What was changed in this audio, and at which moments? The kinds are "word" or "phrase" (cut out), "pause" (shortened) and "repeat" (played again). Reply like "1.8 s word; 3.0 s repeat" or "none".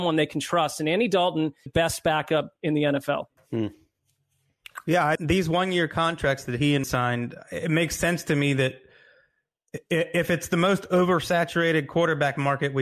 1.7 s phrase; 3.4 s pause; 5.2 s word; 6.8 s word